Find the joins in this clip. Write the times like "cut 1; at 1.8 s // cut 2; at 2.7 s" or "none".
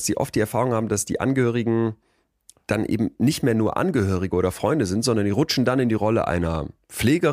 none